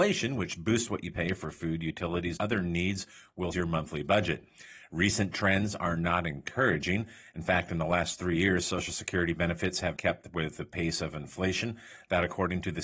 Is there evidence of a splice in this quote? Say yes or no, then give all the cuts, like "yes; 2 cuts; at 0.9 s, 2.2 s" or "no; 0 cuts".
yes; 3 cuts; at 2.4 s, 3.5 s, 10.0 s